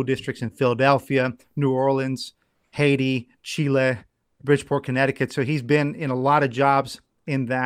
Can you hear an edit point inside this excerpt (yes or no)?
yes